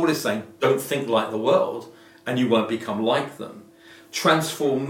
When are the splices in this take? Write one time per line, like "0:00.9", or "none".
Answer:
none